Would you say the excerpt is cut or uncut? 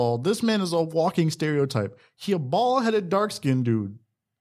uncut